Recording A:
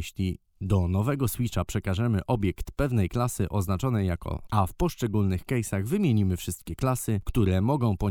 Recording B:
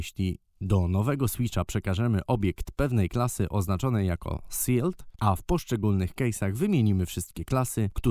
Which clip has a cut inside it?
A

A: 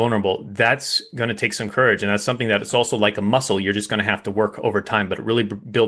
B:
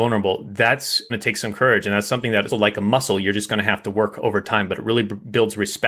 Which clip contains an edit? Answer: B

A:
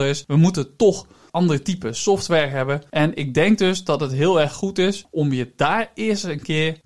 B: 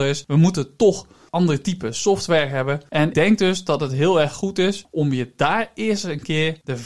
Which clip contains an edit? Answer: B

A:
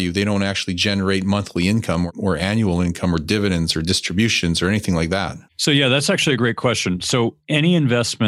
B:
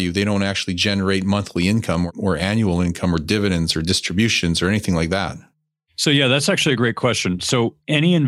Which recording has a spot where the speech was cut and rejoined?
A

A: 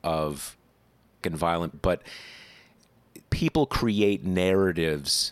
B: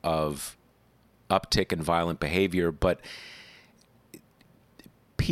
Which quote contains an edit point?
A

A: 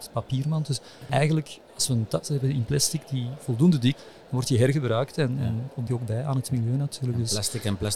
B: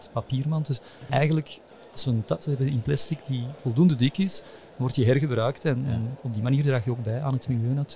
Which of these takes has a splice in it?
A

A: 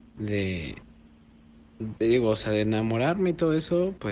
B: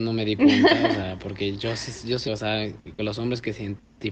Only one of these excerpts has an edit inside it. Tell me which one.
B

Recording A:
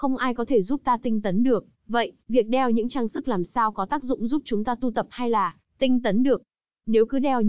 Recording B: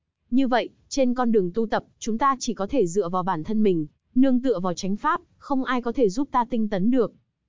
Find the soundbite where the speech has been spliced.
A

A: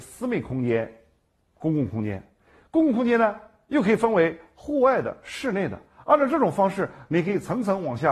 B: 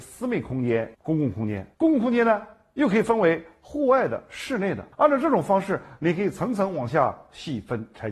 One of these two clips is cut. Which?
B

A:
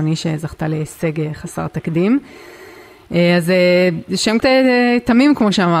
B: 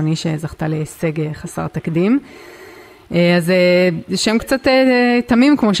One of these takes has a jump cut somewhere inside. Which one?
A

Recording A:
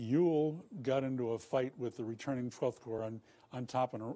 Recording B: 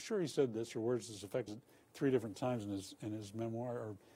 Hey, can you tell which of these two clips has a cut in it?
B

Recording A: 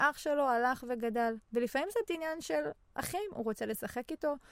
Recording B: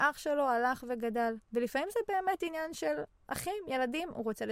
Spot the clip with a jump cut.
A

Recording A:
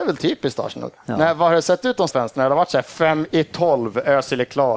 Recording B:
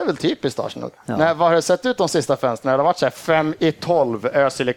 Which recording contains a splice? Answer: A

